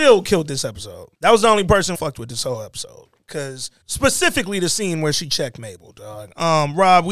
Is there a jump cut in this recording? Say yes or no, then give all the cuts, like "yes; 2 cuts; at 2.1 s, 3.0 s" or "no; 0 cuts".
yes; 3 cuts; at 1.1 s, 1.9 s, 3.8 s